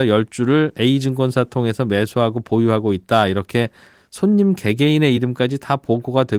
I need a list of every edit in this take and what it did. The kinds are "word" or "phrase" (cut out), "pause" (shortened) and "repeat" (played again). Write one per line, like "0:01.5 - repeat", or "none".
none